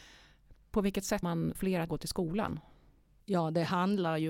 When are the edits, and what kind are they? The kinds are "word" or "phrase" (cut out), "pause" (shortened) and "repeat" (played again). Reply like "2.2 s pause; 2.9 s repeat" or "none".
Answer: 1.2 s word; 1.5 s word; 1.9 s word